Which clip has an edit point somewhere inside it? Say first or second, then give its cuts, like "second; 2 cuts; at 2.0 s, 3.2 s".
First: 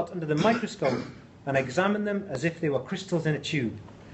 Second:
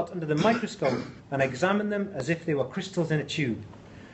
second; 1 cut; at 1.2 s